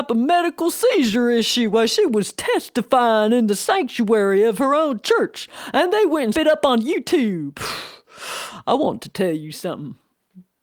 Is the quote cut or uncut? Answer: cut